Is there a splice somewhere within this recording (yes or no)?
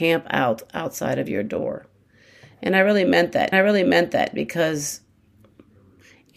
yes